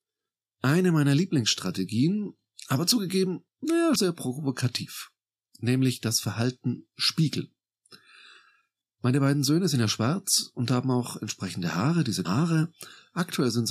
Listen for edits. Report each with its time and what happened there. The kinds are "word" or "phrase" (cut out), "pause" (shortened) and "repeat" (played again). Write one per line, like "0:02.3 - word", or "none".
0:04.0 - word
0:12.2 - word

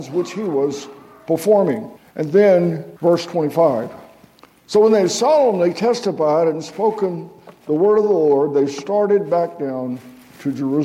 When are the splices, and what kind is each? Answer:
0:02.0 - pause
0:03.0 - pause

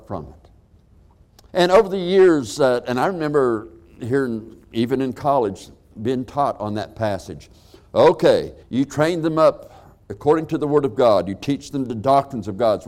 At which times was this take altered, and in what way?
0:01.5 - pause
0:04.6 - pause
0:08.6 - pause
0:10.0 - pause

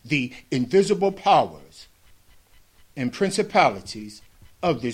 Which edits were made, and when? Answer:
none

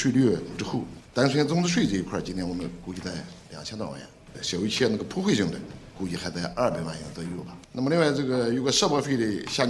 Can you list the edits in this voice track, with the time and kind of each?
0:07.6 - pause

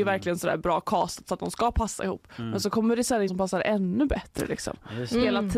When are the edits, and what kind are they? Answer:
0:03.3 - word

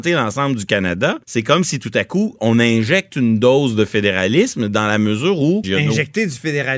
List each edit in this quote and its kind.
0:01.2 - pause

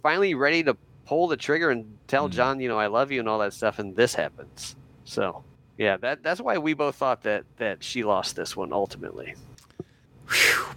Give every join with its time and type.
none

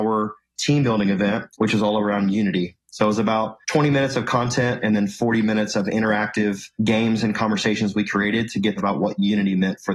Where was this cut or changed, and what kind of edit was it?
0:01.5 - pause
0:03.6 - pause
0:06.7 - pause
0:08.8 - phrase

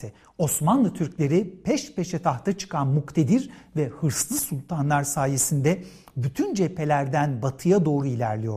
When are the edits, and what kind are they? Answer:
none

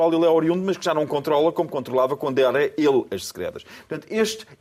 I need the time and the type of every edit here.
none

